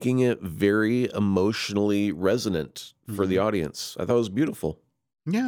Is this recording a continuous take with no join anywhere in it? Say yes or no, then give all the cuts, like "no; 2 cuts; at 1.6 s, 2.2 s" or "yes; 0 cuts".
yes; 0 cuts